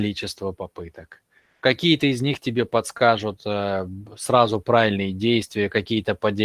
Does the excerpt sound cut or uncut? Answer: uncut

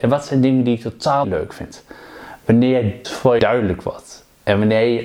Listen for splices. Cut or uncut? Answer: cut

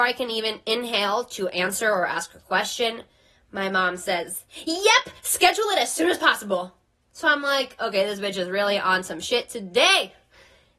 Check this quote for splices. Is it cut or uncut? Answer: uncut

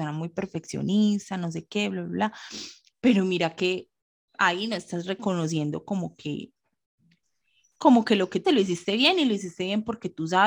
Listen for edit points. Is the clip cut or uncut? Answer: cut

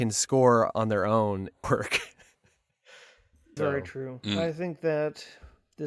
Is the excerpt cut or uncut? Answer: cut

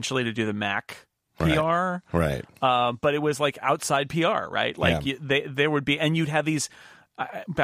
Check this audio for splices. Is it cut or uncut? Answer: uncut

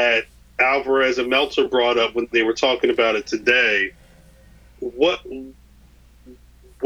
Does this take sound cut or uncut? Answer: uncut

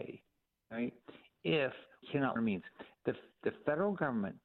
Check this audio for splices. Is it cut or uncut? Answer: cut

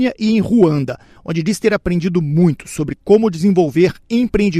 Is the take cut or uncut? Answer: uncut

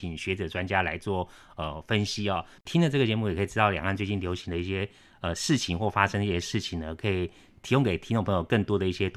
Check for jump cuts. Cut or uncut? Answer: uncut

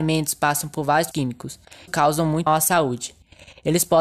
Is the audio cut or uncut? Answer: cut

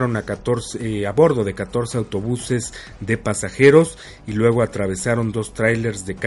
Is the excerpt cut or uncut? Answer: uncut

